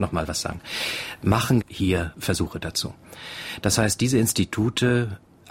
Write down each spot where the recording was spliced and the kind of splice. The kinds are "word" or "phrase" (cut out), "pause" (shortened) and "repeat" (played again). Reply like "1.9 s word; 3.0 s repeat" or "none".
1.6 s word